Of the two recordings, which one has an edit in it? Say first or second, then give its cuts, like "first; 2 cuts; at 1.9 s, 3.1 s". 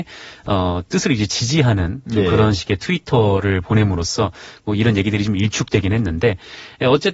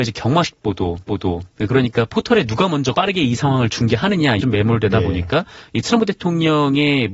second; 3 cuts; at 1.0 s, 2.9 s, 4.4 s